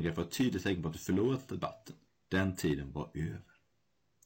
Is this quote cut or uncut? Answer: cut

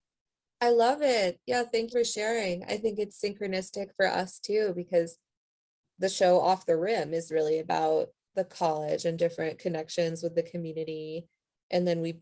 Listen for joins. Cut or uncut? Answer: cut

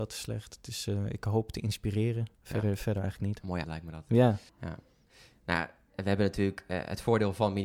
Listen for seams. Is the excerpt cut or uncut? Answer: cut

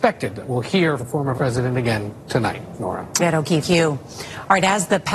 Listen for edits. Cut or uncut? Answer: cut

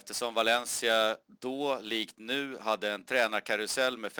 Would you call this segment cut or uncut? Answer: uncut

